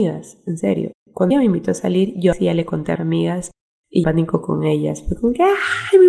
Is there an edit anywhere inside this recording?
yes; 4 cuts; at 1.3 s, 2.3 s, 3.0 s, 4.0 s

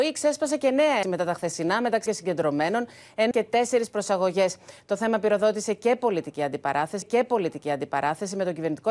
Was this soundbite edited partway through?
yes; 4 cuts; at 1.0 s, 2.1 s, 3.3 s, 7.0 s

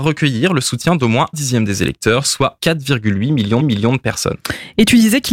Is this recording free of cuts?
no; 3 cuts; at 1.3 s, 2.6 s, 3.6 s

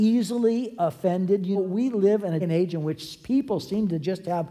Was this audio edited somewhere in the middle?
yes; 2 cuts; at 1.5 s, 2.4 s

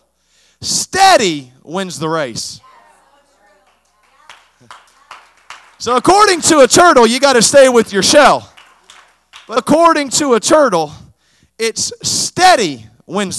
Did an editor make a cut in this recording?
yes; 1 cut; at 9.6 s

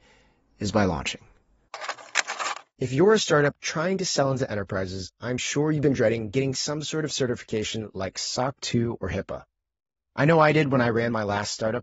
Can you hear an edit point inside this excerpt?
no; 0 cuts

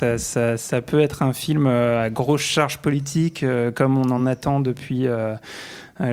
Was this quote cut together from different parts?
no; 0 cuts

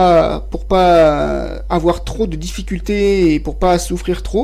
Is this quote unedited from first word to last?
yes; 0 cuts

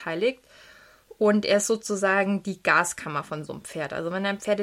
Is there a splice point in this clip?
no; 0 cuts

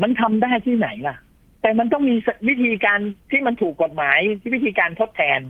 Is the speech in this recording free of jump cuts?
no; 1 cut; at 3.2 s

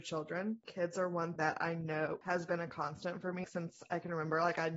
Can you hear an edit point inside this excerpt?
yes; 2 cuts; at 1.4 s, 3.4 s

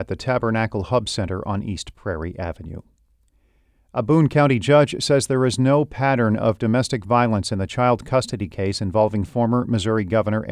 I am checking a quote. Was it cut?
no; 0 cuts

